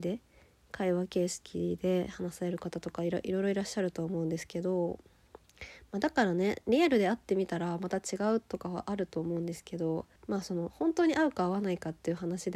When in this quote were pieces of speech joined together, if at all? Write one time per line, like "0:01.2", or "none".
0:10.2